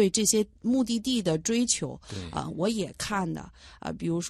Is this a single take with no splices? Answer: yes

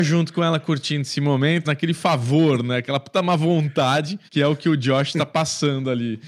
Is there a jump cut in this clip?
yes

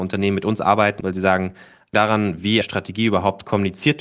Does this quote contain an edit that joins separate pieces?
yes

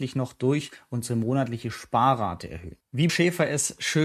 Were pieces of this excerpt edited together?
yes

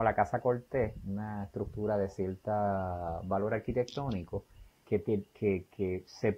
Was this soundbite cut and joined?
yes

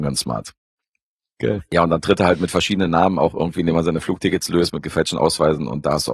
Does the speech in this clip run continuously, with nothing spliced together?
yes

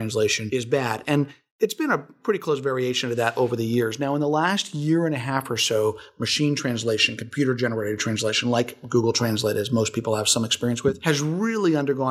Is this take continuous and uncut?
yes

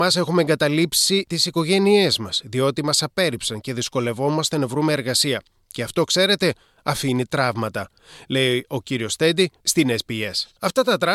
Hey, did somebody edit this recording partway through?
no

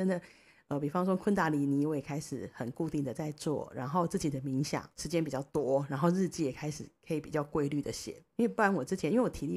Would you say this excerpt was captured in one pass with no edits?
no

